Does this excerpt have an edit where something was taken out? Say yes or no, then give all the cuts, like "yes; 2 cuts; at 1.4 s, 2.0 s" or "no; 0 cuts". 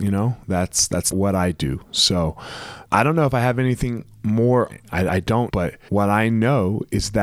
yes; 6 cuts; at 1.1 s, 2.8 s, 4.7 s, 5.1 s, 5.5 s, 5.9 s